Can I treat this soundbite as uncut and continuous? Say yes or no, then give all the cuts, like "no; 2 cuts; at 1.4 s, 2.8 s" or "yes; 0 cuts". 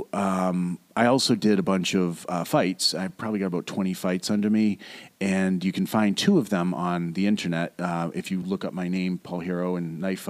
yes; 0 cuts